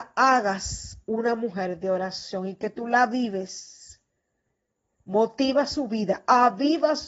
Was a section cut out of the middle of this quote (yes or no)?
no